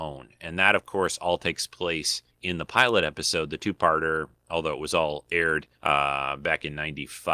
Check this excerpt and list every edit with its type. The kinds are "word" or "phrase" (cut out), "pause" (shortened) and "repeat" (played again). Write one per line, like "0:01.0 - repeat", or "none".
0:02.3 - pause
0:05.7 - pause